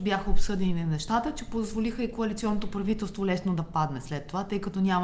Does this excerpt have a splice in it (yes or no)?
no